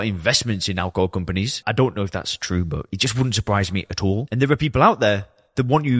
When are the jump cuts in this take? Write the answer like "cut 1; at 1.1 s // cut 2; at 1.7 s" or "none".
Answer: cut 1; at 1.6 s